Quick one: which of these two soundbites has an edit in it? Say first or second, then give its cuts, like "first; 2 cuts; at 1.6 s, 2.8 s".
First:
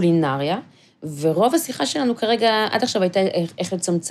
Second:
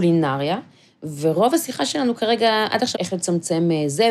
second; 1 cut; at 2.9 s